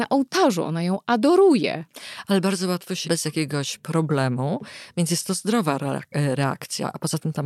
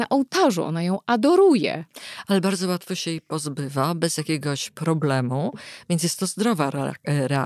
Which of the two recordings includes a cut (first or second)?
first